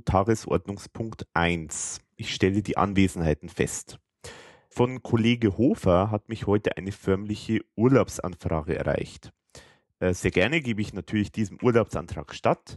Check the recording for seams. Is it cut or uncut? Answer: uncut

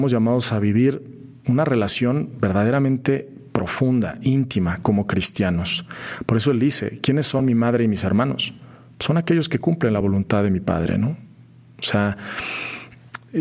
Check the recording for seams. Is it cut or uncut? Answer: uncut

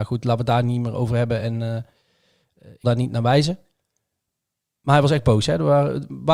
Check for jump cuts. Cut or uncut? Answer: cut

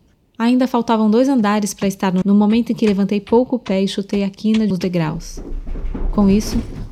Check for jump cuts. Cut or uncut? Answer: cut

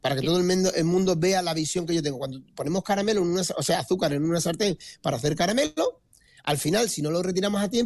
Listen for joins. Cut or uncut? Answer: uncut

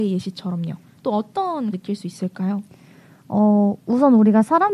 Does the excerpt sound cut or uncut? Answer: cut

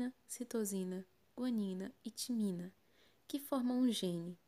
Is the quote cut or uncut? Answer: uncut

